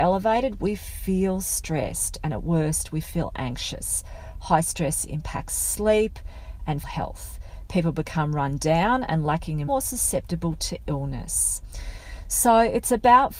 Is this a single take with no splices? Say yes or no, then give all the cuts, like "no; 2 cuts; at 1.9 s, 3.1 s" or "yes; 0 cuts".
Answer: no; 2 cuts; at 6.8 s, 9.7 s